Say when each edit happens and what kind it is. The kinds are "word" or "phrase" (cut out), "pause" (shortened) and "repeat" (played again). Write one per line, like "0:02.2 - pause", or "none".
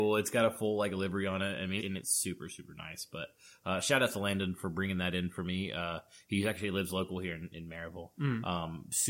0:01.8 - word